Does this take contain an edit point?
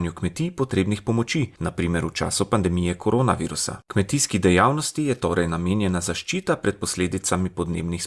yes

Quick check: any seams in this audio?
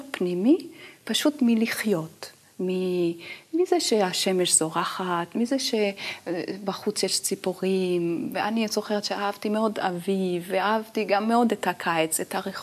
no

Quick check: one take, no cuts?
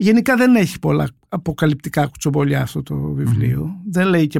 yes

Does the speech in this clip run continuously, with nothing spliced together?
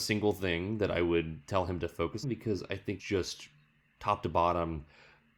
no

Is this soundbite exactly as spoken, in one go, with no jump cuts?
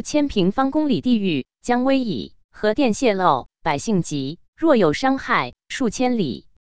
no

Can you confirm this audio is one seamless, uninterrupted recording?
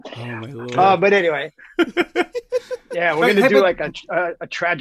yes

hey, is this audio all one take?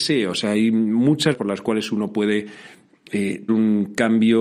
no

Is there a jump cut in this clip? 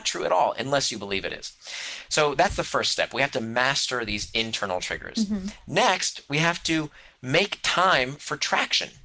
no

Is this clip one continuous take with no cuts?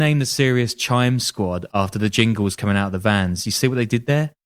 yes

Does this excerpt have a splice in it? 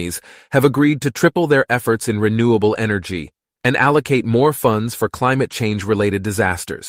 no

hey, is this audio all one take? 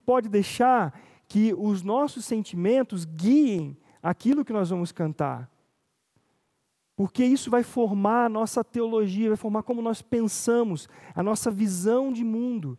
yes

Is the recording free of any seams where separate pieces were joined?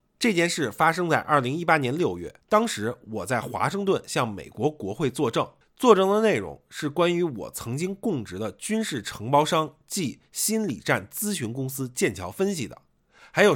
no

